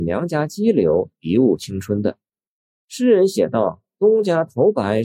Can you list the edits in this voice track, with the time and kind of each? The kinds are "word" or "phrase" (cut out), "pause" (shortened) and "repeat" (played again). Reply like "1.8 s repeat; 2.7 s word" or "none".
none